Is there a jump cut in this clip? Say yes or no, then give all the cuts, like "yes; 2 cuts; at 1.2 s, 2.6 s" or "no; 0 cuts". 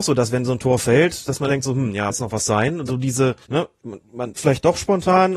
yes; 5 cuts; at 1.5 s, 2.1 s, 2.9 s, 3.4 s, 4.4 s